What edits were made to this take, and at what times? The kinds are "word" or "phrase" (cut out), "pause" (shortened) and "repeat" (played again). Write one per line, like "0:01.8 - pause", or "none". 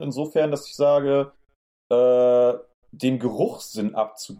none

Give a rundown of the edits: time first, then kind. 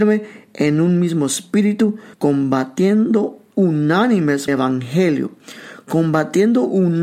0:02.1 - pause
0:04.5 - phrase

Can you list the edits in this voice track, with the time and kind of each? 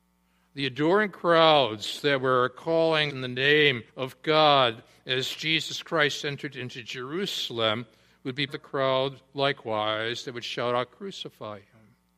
0:03.1 - phrase
0:03.9 - pause
0:08.5 - word

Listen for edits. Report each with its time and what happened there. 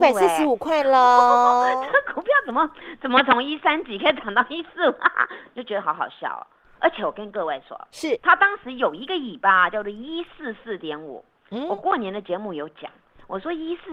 none

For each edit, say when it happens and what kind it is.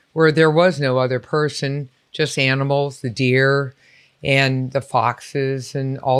none

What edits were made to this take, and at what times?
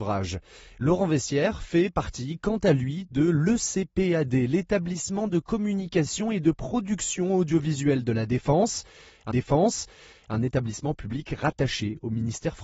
0:09.3 - repeat

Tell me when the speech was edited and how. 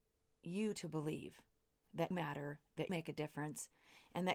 0:02.1 - word
0:02.9 - word

